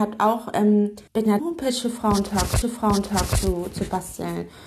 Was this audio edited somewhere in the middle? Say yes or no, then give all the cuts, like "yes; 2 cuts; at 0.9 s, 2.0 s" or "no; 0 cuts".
yes; 3 cuts; at 1.1 s, 1.4 s, 2.6 s